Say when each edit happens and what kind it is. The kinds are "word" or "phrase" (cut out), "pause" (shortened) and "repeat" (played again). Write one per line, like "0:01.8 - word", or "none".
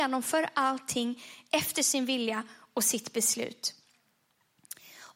none